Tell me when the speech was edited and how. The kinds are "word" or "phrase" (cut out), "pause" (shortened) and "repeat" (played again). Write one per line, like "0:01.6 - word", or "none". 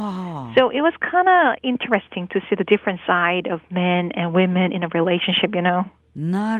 none